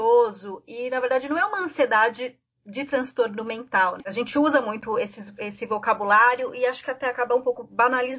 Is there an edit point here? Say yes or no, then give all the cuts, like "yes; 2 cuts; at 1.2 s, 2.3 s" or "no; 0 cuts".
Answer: no; 0 cuts